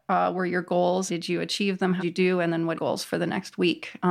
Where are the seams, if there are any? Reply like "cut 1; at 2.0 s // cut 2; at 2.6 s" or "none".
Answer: cut 1; at 1.1 s // cut 2; at 2.0 s // cut 3; at 2.7 s